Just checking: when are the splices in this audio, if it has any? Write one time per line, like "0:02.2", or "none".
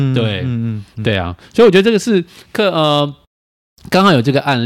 none